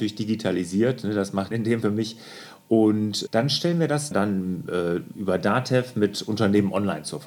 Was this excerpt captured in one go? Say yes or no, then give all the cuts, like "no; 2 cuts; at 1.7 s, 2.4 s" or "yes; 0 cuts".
no; 4 cuts; at 1.5 s, 1.8 s, 3.3 s, 4.1 s